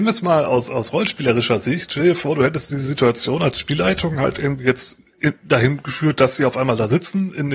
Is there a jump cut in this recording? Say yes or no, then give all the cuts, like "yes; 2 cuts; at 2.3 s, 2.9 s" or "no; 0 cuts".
no; 0 cuts